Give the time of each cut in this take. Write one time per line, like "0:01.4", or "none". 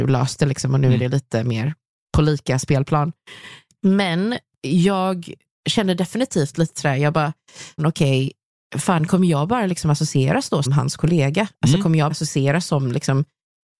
0:07.8
0:10.7
0:12.1